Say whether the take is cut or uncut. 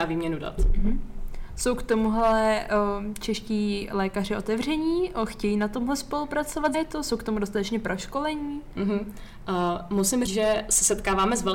cut